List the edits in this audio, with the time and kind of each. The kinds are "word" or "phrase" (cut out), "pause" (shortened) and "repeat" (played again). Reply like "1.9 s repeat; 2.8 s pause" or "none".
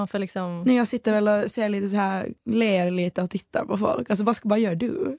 2.4 s pause